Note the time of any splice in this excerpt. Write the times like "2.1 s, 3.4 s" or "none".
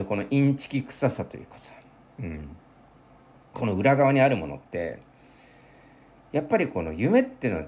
none